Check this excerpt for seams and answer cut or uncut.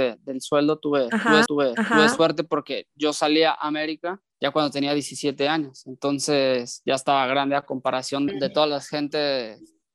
cut